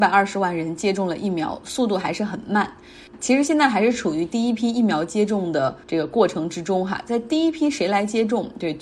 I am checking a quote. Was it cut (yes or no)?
yes